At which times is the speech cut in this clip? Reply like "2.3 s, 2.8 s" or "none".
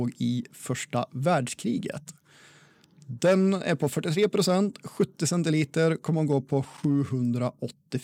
none